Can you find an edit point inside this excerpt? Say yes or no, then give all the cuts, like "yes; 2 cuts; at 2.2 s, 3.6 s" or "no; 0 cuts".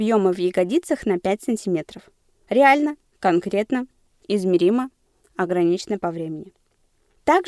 no; 0 cuts